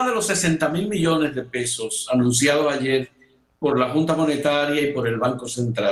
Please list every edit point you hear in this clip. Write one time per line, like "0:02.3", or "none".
none